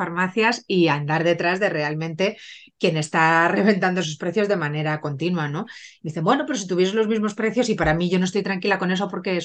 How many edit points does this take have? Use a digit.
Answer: 0